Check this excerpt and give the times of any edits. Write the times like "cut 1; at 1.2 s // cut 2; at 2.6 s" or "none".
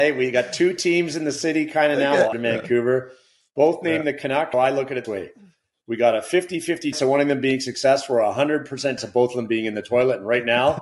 cut 1; at 2.3 s // cut 2; at 4.5 s // cut 3; at 5.0 s // cut 4; at 6.9 s // cut 5; at 9.0 s